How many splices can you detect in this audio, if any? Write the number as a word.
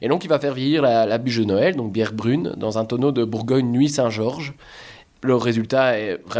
zero